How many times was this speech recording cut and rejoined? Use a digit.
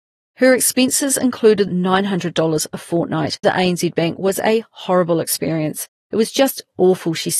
2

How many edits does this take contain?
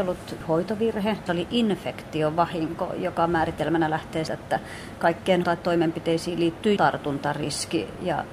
4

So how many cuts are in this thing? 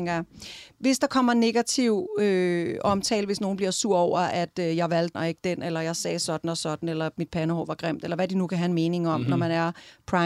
1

